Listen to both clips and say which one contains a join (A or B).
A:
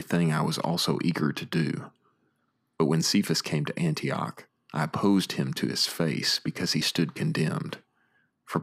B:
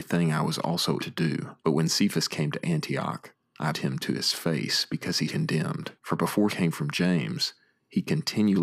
B